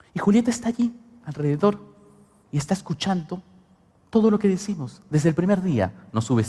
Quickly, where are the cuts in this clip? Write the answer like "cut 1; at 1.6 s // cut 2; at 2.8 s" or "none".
none